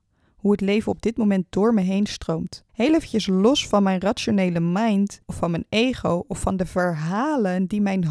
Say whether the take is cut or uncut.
cut